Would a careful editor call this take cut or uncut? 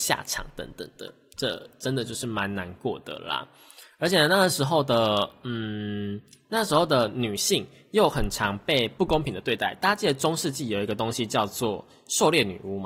uncut